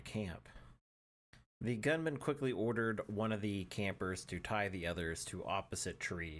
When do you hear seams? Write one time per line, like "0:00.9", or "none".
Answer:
none